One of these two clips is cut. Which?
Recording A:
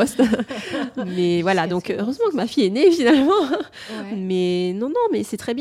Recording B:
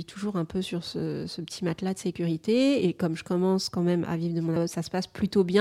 B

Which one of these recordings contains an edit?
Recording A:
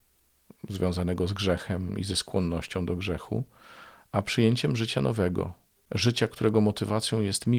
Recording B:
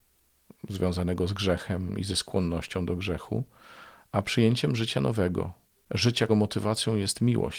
B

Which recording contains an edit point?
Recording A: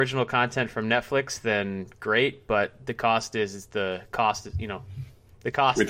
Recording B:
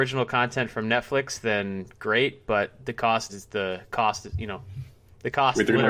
B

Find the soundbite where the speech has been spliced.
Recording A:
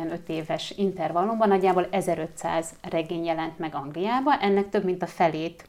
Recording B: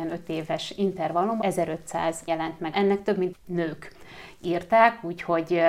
B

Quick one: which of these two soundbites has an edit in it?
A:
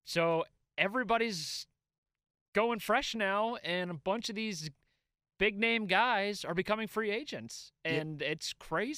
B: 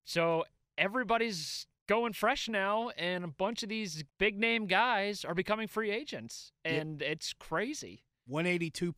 B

